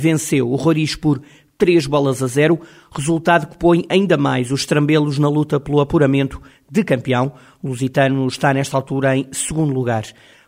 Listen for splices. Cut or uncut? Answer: uncut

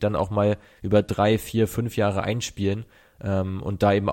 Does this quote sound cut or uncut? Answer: uncut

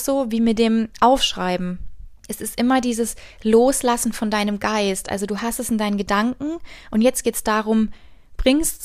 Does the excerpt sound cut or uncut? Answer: cut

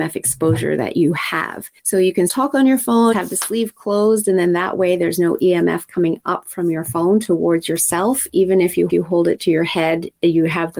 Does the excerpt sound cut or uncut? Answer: cut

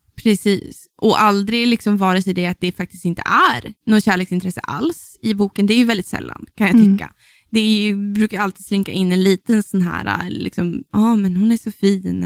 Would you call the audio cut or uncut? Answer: cut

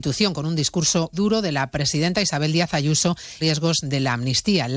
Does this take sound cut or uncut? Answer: cut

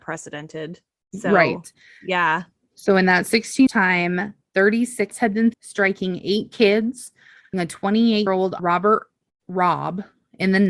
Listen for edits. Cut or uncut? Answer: cut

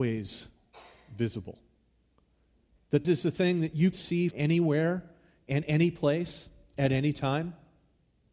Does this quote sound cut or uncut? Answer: cut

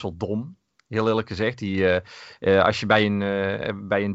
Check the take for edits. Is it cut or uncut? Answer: uncut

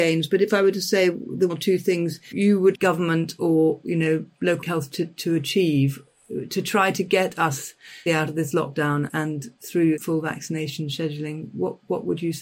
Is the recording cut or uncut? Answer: cut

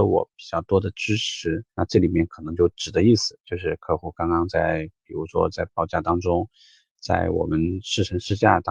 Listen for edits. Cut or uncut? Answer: cut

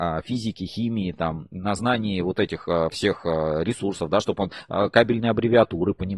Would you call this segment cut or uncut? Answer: uncut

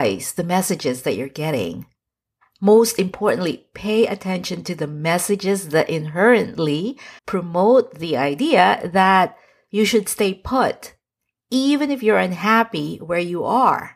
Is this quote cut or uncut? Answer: cut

